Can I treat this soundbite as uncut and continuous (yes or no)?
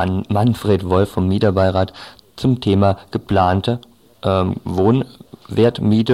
yes